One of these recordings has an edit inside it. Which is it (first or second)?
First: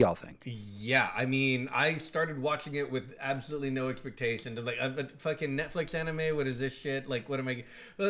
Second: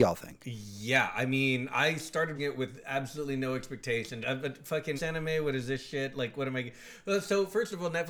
second